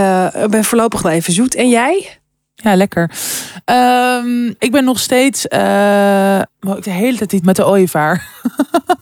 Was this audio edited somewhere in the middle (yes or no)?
yes